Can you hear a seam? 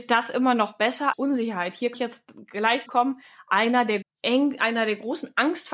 yes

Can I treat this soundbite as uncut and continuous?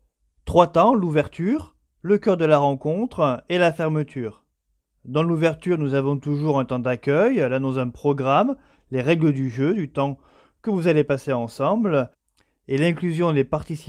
yes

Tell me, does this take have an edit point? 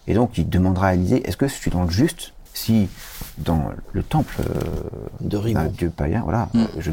yes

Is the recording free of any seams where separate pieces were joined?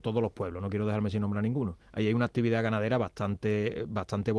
no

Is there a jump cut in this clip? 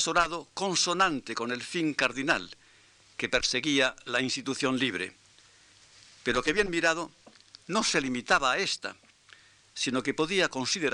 no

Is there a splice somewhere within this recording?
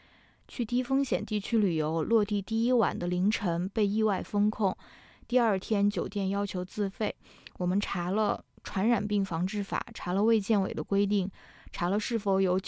no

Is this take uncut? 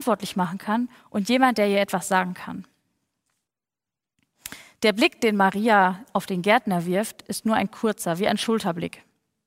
yes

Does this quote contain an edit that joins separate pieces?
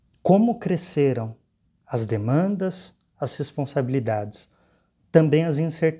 no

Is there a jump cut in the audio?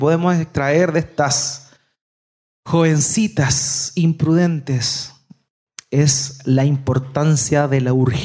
no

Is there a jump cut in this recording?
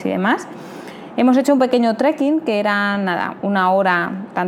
no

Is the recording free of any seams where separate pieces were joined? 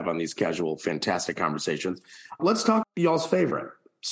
no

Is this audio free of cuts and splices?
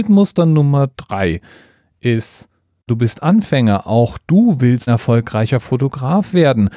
no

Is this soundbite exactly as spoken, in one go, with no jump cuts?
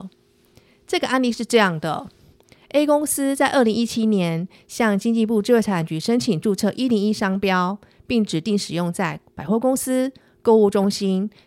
yes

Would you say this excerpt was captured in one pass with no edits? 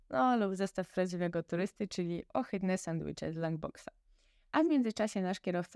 yes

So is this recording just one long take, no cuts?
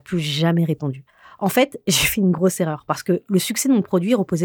yes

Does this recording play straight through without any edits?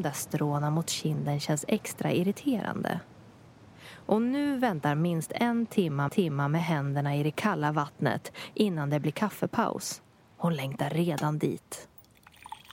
no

